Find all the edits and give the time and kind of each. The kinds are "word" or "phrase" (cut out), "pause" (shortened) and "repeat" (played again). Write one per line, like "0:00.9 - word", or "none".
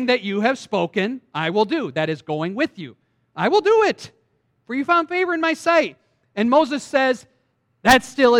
none